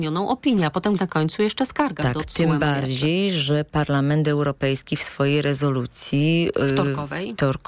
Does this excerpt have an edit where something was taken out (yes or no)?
yes